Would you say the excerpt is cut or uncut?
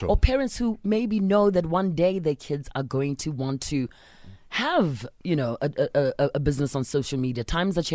uncut